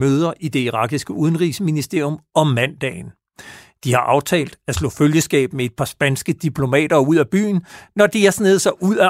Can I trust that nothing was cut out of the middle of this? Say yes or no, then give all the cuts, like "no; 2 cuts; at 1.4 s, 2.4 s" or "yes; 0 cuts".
yes; 0 cuts